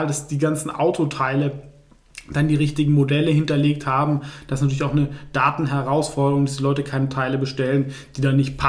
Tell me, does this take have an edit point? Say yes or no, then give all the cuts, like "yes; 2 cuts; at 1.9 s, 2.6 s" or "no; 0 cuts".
no; 0 cuts